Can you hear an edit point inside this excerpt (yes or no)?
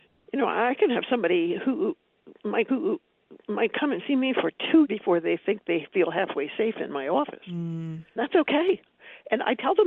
yes